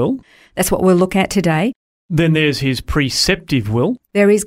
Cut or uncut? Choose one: uncut